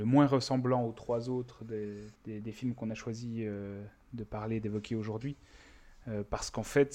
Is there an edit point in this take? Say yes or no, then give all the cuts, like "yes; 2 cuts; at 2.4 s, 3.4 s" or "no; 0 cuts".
yes; 1 cut; at 2.2 s